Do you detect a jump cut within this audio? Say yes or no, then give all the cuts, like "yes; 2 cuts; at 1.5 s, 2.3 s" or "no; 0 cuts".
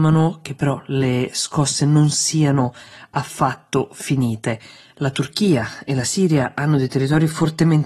no; 0 cuts